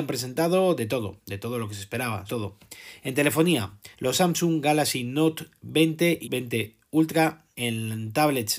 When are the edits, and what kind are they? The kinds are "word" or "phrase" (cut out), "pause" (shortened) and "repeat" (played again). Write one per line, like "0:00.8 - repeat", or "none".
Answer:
0:02.3 - word
0:03.9 - pause
0:06.2 - word
0:07.5 - pause